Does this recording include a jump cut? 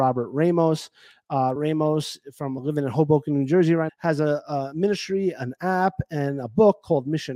yes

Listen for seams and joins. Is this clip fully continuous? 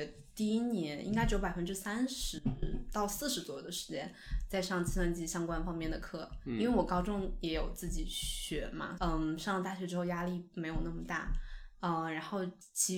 no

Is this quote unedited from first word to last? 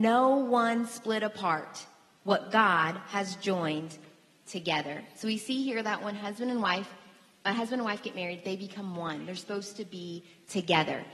yes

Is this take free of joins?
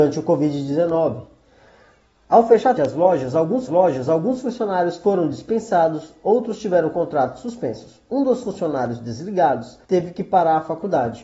no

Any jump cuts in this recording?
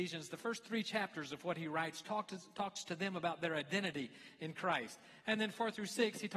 no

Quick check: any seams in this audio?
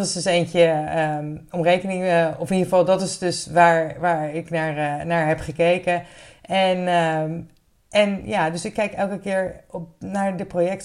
no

